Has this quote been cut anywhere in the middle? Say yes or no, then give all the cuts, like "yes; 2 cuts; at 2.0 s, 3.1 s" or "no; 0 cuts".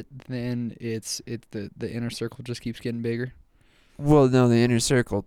no; 0 cuts